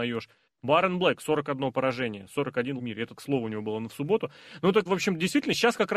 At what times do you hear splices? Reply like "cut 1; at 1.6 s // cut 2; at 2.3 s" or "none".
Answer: cut 1; at 2.8 s // cut 2; at 3.2 s // cut 3; at 4.9 s